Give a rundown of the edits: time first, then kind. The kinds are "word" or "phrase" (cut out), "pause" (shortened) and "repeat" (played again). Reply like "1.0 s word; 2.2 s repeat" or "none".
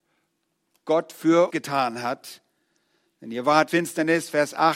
1.5 s word; 3.7 s word